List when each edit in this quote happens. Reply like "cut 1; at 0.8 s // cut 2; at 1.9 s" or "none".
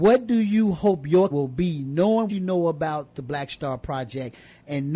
cut 1; at 1.3 s // cut 2; at 2.3 s